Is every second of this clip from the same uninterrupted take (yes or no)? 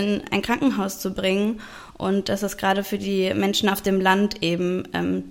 yes